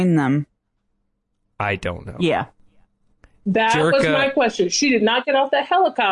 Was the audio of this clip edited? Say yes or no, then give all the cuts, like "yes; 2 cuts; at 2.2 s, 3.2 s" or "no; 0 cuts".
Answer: no; 0 cuts